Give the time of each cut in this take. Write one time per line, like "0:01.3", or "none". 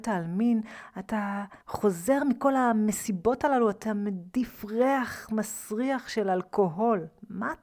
0:01.6

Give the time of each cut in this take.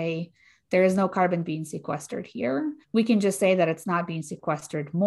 0:02.8

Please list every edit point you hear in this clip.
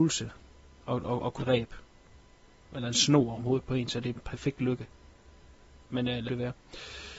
0:01.4
0:03.4
0:04.2
0:06.3

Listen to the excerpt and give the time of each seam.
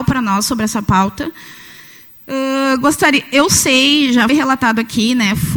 0:04.3

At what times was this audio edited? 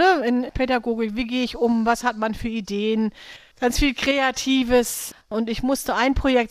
none

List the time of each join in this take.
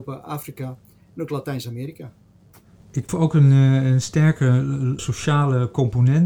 0:03.1
0:05.0

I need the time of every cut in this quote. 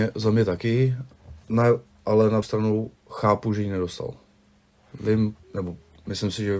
0:01.4
0:02.4
0:03.0
0:05.4

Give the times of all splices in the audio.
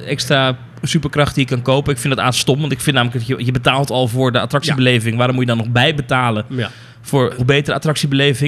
0:07.4

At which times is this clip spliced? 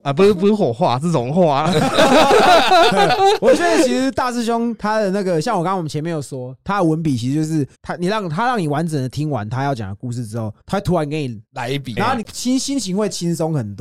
0:07.7
0:10.6
0:11.5
0:12.0

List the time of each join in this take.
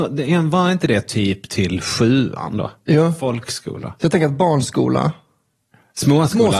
none

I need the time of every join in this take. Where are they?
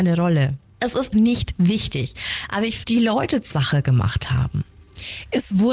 0:01.1
0:02.8
0:03.5

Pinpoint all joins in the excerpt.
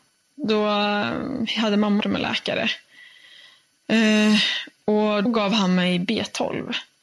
0:02.0
0:05.3

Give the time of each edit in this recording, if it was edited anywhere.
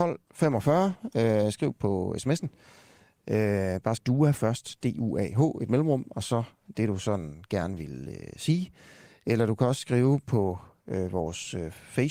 0:04.0

